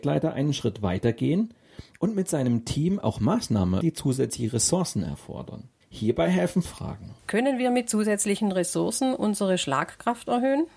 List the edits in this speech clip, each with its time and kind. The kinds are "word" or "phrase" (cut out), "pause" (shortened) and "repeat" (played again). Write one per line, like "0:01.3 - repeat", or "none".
0:03.8 - word
0:05.8 - pause
0:06.6 - word
0:07.2 - pause

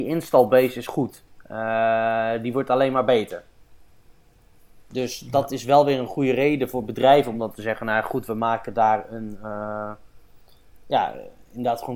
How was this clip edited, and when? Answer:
none

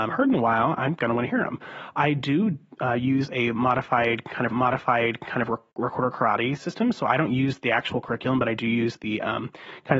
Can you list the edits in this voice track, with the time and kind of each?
0:04.5 - repeat

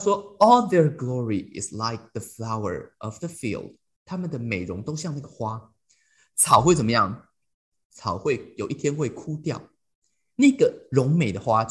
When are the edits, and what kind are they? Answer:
none

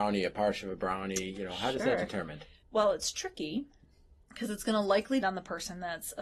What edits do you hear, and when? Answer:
0:02.6 - pause
0:04.2 - pause
0:05.2 - word

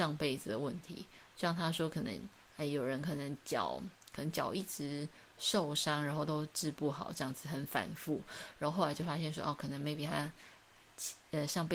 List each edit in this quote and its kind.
none

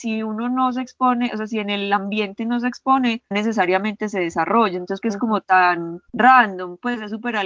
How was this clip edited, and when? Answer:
0:03.3 - word
0:05.0 - phrase
0:06.1 - pause

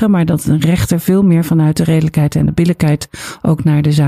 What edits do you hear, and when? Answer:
none

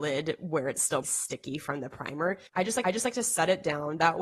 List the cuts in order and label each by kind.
0:01.0 - word
0:02.5 - pause
0:02.8 - repeat

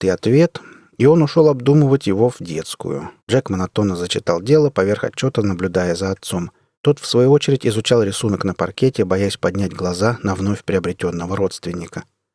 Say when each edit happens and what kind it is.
0:03.2 - pause
0:06.7 - pause

